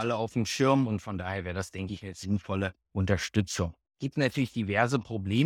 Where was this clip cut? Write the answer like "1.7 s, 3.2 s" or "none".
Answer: 2.8 s